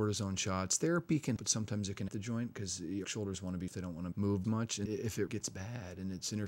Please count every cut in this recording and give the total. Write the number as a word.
eight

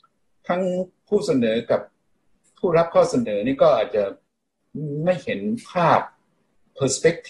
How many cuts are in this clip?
zero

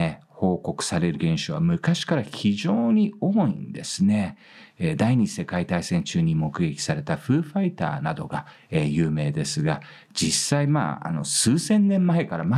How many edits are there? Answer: one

